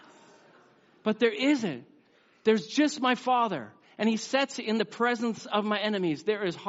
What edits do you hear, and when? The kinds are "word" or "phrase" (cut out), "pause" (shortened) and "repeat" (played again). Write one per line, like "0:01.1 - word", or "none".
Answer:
none